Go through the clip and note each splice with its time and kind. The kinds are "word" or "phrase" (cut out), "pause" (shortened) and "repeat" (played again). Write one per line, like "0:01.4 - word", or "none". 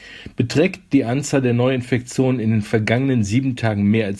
none